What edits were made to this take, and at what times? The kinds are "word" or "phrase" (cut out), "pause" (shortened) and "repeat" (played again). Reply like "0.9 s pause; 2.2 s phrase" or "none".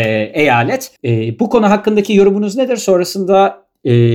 1.0 s pause